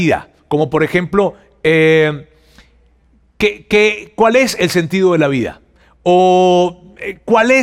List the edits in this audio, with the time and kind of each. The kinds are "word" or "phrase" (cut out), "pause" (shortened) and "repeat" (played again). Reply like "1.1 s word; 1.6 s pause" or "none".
none